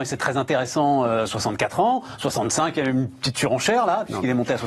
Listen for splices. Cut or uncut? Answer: uncut